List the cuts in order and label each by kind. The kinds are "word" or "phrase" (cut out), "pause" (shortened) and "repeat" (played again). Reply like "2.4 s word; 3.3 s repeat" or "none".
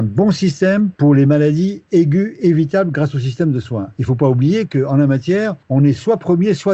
1.0 s pause; 5.6 s pause